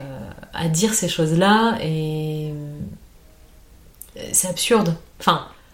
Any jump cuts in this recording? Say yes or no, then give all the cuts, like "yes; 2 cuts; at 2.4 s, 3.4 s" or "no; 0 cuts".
no; 0 cuts